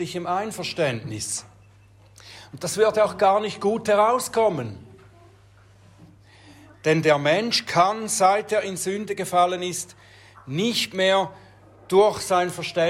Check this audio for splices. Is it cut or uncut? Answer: uncut